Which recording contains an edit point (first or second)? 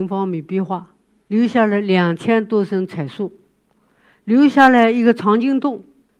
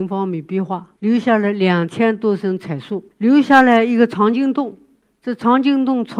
second